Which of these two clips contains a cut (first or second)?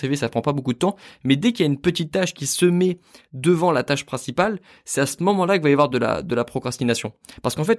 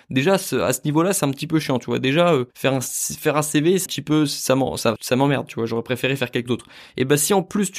second